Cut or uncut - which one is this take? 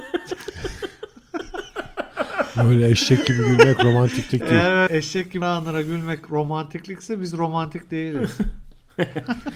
cut